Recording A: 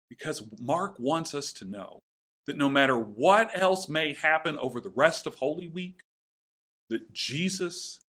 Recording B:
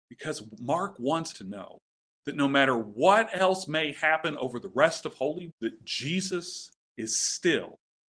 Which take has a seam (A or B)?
B